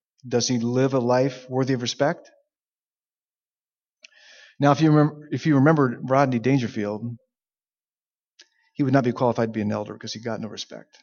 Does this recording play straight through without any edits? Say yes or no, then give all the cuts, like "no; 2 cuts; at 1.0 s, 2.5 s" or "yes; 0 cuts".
yes; 0 cuts